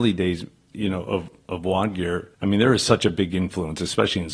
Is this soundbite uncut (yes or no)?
no